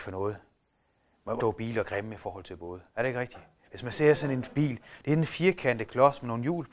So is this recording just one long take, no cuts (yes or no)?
no